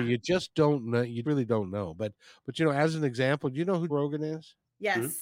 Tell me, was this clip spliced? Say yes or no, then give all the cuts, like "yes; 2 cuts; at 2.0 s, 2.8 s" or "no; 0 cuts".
yes; 2 cuts; at 1.2 s, 3.9 s